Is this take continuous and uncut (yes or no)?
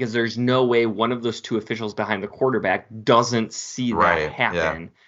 yes